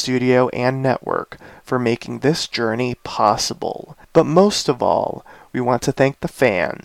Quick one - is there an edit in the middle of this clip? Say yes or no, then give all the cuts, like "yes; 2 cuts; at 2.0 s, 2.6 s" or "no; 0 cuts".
yes; 1 cut; at 4.0 s